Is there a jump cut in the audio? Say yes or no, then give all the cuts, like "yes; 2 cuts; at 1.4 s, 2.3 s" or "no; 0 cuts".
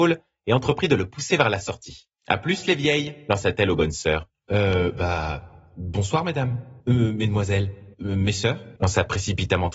yes; 5 cuts; at 2.1 s, 4.3 s, 6.8 s, 7.9 s, 8.8 s